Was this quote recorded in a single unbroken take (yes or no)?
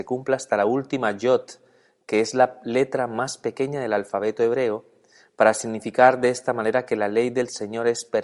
yes